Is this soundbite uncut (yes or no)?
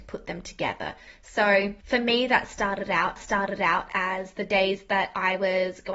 no